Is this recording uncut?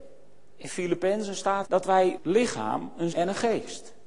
no; 3 cuts; at 1.6 s, 2.2 s, 3.1 s

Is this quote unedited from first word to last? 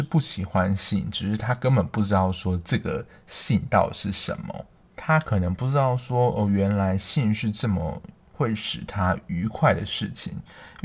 yes; 0 cuts

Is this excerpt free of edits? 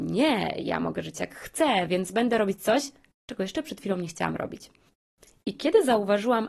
yes; 0 cuts

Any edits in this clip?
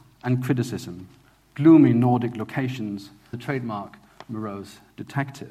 yes; 1 cut; at 3.3 s

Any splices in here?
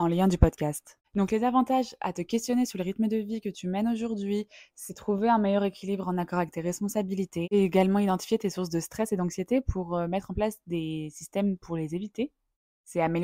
no; 0 cuts

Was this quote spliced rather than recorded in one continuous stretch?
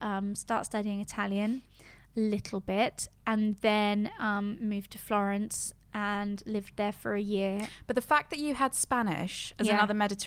no; 0 cuts

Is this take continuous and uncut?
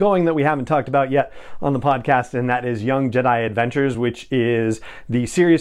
yes; 0 cuts

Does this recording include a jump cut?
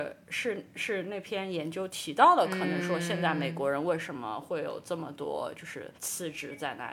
yes; 1 cut; at 6.0 s

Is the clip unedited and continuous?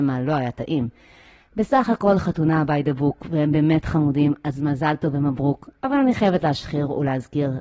yes; 0 cuts

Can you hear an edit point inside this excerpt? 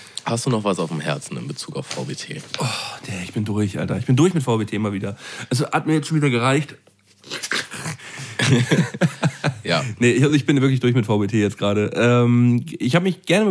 no; 0 cuts

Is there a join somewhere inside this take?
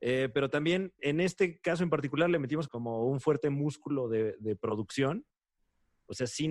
yes; 2 cuts; at 1.0 s, 2.7 s

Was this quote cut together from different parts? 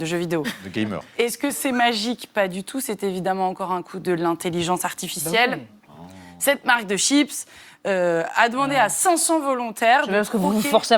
no; 0 cuts

